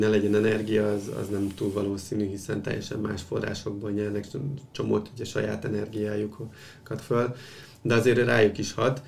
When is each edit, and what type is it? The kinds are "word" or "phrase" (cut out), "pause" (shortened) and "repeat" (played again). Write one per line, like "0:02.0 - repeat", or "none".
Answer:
0:07.0 - word